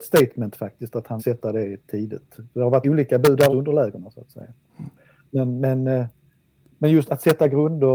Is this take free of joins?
no; 4 cuts; at 1.2 s, 2.8 s, 3.5 s, 7.1 s

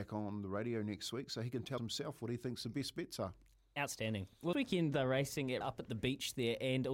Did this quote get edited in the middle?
yes; 3 cuts; at 1.8 s, 4.5 s, 5.6 s

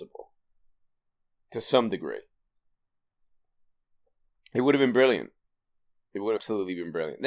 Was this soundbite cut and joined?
yes; 1 cut; at 6.4 s

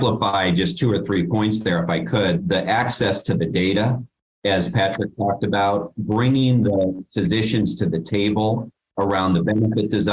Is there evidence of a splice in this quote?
yes; 1 cut; at 2.4 s

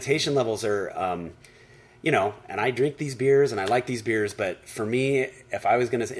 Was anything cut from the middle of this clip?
no; 0 cuts

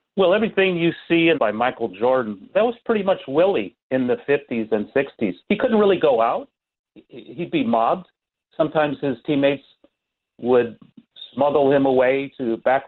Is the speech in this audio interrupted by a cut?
yes; 3 cuts; at 1.3 s, 2.5 s, 5.4 s

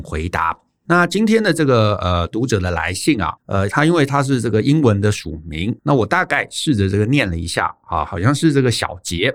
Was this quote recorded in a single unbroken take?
no; 2 cuts; at 3.4 s, 5.8 s

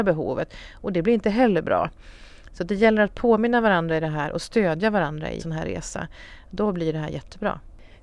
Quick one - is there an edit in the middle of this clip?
yes; 1 cut; at 5.4 s

